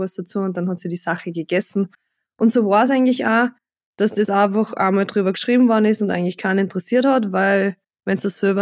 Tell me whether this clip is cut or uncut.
uncut